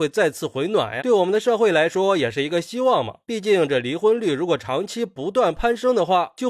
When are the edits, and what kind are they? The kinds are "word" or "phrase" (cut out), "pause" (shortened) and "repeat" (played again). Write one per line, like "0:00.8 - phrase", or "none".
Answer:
0:01.0 - word